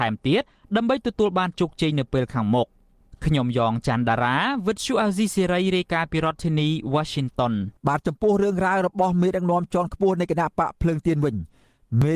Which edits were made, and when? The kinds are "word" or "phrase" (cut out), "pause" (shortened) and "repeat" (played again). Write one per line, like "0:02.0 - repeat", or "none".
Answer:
0:07.8 - pause